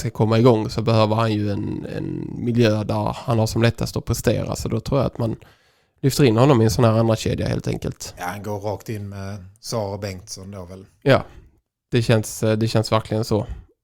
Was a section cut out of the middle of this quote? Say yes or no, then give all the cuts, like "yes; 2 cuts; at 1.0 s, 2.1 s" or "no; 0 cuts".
no; 0 cuts